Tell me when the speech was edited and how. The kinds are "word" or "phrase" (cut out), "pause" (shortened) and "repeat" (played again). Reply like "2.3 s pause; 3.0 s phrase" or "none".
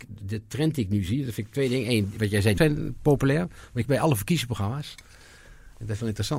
2.6 s word; 3.8 s word